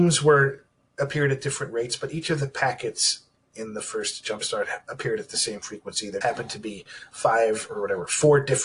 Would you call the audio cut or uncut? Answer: cut